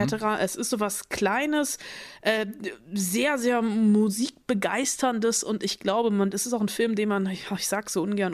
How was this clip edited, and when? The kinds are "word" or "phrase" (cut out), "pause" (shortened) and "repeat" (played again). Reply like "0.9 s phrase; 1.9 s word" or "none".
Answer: none

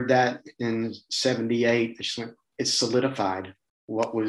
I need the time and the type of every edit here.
none

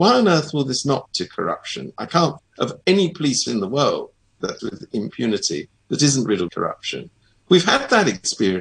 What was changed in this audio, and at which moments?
1.1 s word; 2.4 s word; 3.5 s word; 4.6 s word; 6.5 s word

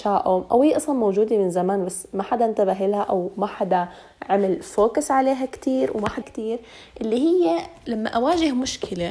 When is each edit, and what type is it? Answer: 6.2 s phrase

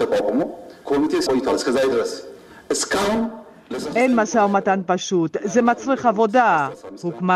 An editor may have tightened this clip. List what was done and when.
1.3 s word

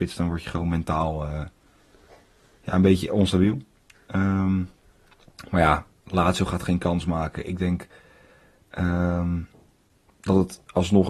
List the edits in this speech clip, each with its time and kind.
none

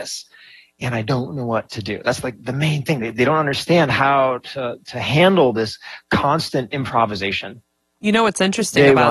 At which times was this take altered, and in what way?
none

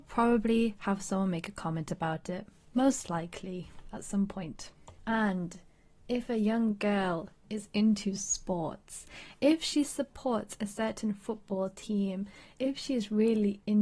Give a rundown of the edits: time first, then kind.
none

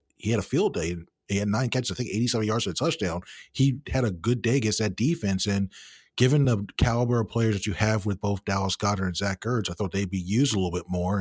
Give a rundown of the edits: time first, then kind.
none

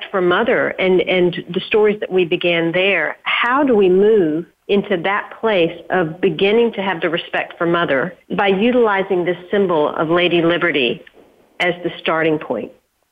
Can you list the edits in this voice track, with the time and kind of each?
4.6 s pause; 8.2 s pause

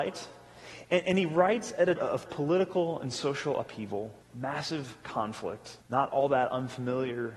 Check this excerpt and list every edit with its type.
2.0 s word; 2.3 s word; 4.2 s pause; 5.8 s pause

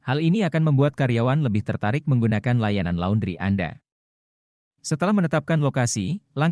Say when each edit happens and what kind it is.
none

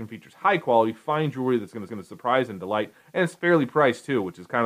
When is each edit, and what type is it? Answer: 1.9 s repeat

